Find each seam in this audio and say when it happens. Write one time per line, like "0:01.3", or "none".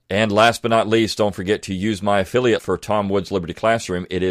0:02.6